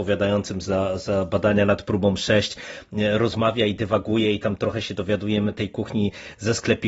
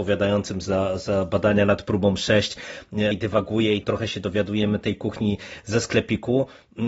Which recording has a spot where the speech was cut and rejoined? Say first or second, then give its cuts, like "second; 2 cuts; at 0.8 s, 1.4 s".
second; 2 cuts; at 3.1 s, 3.8 s